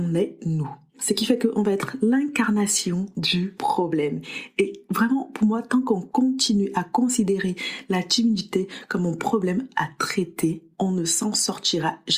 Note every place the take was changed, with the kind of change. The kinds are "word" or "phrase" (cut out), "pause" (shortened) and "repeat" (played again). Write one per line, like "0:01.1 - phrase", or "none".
none